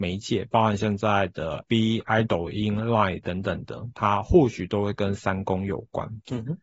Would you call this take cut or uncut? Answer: cut